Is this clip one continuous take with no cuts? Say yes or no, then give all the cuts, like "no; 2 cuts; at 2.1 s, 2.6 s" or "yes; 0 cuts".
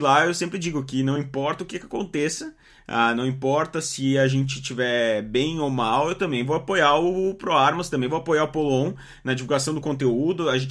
yes; 0 cuts